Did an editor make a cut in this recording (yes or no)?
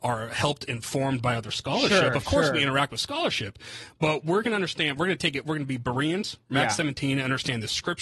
no